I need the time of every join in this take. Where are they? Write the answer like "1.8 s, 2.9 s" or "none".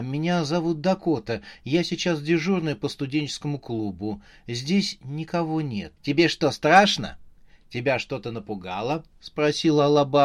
6.0 s